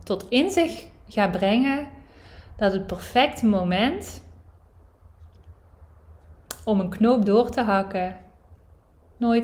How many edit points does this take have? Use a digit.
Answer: 0